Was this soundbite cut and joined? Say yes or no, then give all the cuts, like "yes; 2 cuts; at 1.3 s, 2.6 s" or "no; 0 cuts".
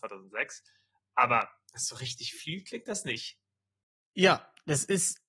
no; 0 cuts